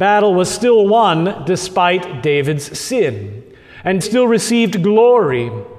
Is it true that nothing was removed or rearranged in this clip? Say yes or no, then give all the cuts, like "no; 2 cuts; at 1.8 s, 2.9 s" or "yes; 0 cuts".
no; 1 cut; at 4.0 s